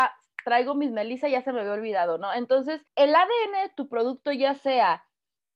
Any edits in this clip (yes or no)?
yes